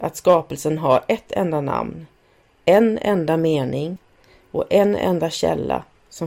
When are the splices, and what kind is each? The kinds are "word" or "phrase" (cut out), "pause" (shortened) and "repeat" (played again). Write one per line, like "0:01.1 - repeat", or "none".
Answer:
none